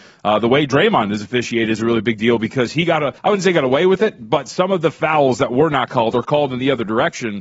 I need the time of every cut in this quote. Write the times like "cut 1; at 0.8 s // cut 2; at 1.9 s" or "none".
cut 1; at 3.2 s